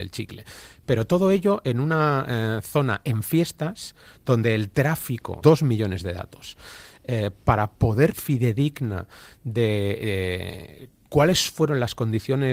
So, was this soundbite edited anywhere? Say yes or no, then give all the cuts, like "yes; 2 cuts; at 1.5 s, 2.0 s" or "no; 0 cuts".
yes; 2 cuts; at 5.4 s, 8.1 s